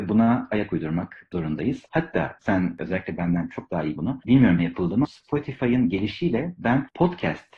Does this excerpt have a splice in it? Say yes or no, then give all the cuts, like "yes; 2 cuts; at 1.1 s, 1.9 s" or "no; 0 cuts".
yes; 4 cuts; at 2.4 s, 4.0 s, 4.6 s, 5.0 s